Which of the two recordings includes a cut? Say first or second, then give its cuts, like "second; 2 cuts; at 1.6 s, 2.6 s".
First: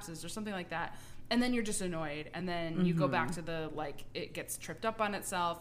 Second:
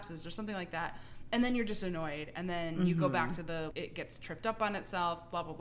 second; 1 cut; at 3.7 s